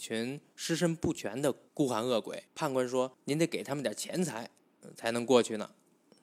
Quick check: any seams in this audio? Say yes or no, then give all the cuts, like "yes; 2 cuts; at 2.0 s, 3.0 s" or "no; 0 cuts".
yes; 2 cuts; at 2.5 s, 3.1 s